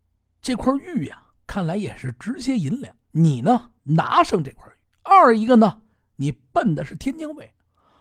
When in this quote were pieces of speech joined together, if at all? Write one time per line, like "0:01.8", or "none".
0:01.4
0:03.0
0:03.8
0:04.8